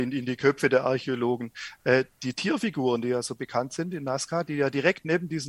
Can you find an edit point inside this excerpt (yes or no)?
no